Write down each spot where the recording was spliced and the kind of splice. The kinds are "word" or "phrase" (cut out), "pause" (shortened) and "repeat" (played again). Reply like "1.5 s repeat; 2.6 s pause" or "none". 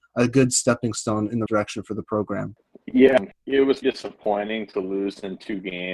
1.5 s word; 3.8 s word